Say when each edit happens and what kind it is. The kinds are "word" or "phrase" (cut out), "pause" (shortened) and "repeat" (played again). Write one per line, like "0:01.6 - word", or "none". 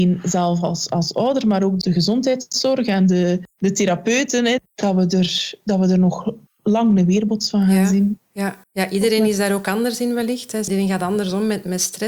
0:08.6 - pause